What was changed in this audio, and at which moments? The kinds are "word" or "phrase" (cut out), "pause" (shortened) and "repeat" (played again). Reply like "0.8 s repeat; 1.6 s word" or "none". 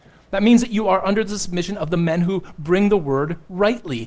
none